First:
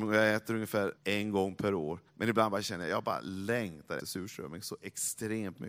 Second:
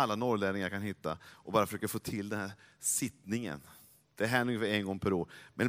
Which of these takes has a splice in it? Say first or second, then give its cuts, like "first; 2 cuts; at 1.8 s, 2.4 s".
first; 3 cuts; at 1.0 s, 2.1 s, 4.0 s